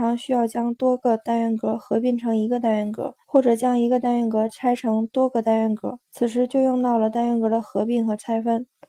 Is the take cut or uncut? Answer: cut